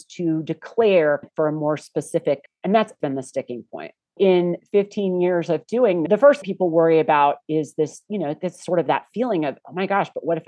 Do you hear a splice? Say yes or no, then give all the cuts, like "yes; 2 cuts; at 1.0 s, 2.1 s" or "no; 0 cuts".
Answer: yes; 6 cuts; at 1.2 s, 2.5 s, 3.0 s, 4.2 s, 6.1 s, 6.4 s